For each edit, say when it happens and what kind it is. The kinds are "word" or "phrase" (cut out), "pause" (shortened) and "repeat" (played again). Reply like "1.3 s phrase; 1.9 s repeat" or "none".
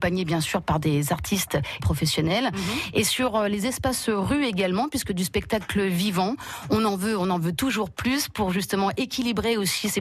1.8 s phrase